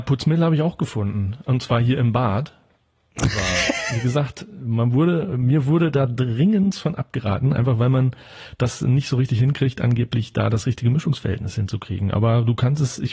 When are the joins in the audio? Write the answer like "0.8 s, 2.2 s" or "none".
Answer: none

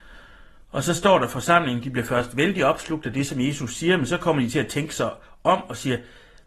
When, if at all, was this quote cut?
none

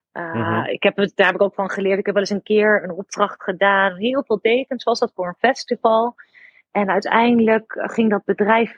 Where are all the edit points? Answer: none

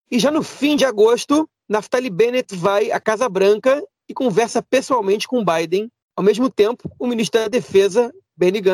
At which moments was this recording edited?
none

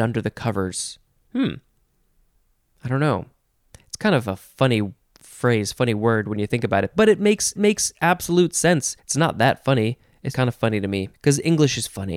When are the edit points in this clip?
7.6 s, 9.0 s, 10.3 s, 11.1 s

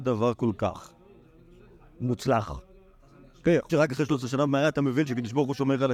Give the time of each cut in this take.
3.7 s

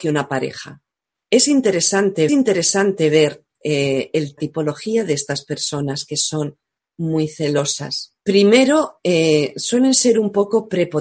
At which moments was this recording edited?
2.3 s, 4.4 s, 8.2 s

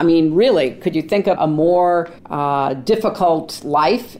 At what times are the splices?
1.4 s, 2.2 s

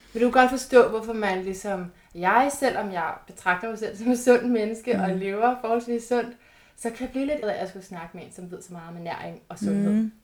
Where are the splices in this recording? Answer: 7.4 s

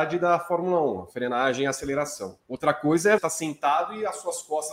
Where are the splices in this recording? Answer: 2.4 s, 3.2 s

